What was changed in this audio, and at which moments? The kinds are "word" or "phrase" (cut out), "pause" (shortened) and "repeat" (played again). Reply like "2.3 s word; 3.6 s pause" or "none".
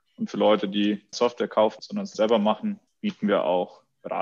1.1 s word; 1.8 s word; 2.1 s word; 2.9 s pause